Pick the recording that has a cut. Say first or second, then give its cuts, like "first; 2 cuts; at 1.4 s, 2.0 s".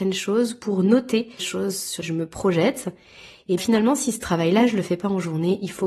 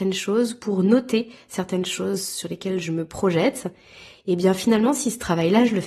first; 3 cuts; at 1.4 s, 2.0 s, 3.6 s